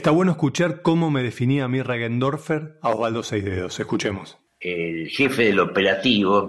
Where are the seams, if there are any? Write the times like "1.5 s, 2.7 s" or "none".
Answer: 4.5 s

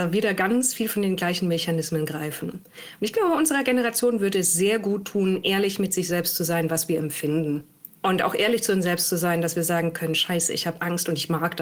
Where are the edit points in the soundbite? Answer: 7.9 s

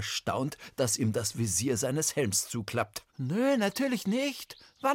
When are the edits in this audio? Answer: 3.1 s

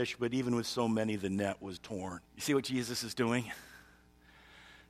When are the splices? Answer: 1.8 s, 2.3 s

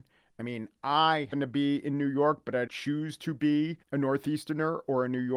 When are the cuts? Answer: 1.3 s, 2.7 s, 3.8 s

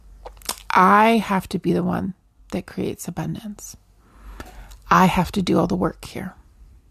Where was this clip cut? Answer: none

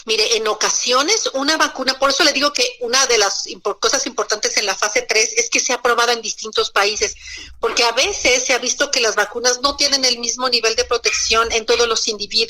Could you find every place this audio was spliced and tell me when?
none

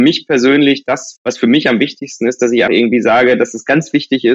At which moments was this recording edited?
1.2 s, 2.7 s

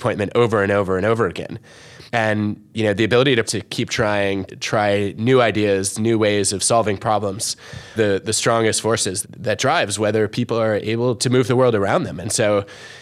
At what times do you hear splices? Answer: 2.1 s, 3.4 s, 4.5 s, 8.0 s, 9.2 s

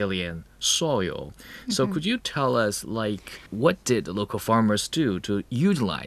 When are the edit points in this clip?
3.5 s

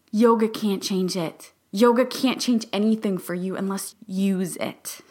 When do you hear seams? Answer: 1.6 s, 3.9 s

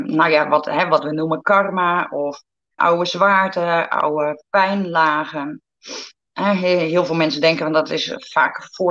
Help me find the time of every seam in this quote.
2.8 s

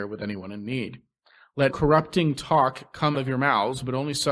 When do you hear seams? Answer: 1.7 s, 3.1 s

